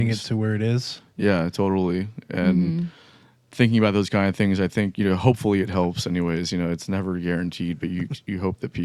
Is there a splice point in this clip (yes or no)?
no